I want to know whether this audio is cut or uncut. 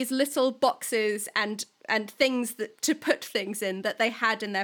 uncut